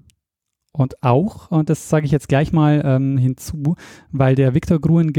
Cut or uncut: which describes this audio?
uncut